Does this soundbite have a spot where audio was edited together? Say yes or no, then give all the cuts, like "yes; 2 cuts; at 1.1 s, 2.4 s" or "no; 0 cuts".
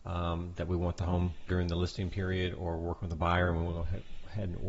yes; 1 cut; at 1.5 s